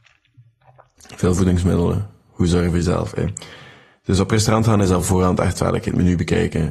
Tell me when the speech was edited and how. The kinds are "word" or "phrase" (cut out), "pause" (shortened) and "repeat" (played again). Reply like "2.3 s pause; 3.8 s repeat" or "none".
none